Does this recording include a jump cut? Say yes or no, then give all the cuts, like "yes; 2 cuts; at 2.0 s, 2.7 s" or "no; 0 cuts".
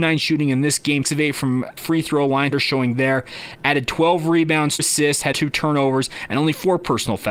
yes; 5 cuts; at 1.0 s, 1.8 s, 2.5 s, 4.8 s, 5.3 s